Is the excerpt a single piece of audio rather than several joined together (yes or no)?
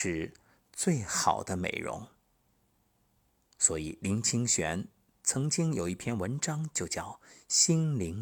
yes